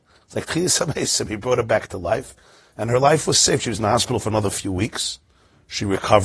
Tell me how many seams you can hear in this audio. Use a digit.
0